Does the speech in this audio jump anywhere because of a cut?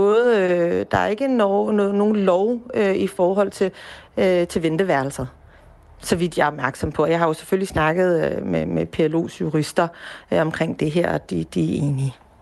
no; 0 cuts

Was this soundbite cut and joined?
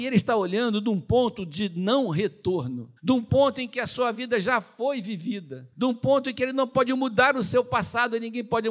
yes; 2 cuts; at 3.0 s, 5.7 s

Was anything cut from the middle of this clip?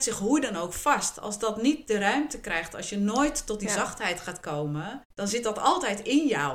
yes; 1 cut; at 5.1 s

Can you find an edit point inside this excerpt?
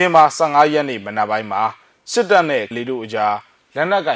yes; 1 cut; at 2.7 s

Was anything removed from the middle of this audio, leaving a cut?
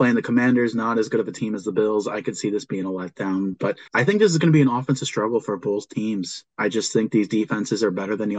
yes; 1 cut; at 3.9 s

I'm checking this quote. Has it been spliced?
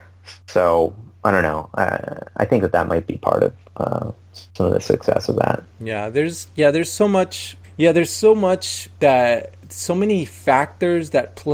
yes; 4 cuts; at 4.5 s, 5.7 s, 7.6 s, 9.0 s

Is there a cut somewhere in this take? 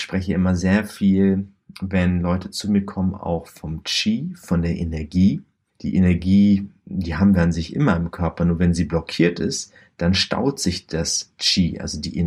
no; 0 cuts

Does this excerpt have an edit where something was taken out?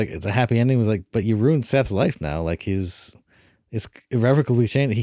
no; 0 cuts

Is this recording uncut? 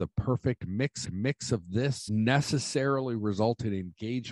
no; 2 cuts; at 1.0 s, 2.1 s

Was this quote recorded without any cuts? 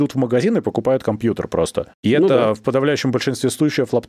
yes; 0 cuts

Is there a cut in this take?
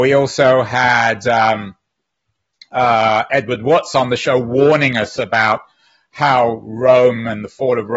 no; 0 cuts

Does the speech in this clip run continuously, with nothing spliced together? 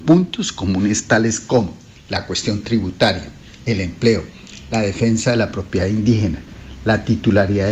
yes; 0 cuts

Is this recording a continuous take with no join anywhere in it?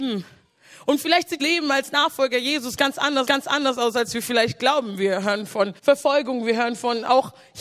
no; 3 cuts; at 1.4 s, 3.3 s, 5.8 s

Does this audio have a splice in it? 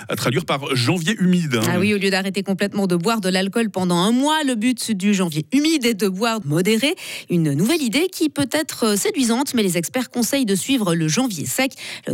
yes; 1 cut; at 6.4 s

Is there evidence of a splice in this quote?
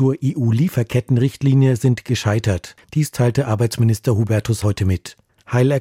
yes; 1 cut; at 4.6 s

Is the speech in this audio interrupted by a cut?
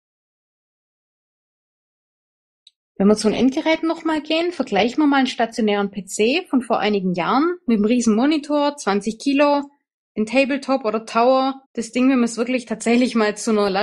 yes; 1 cut; at 11.6 s

